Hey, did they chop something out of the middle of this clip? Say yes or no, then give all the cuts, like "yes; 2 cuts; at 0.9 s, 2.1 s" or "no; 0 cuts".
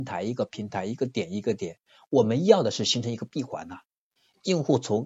no; 0 cuts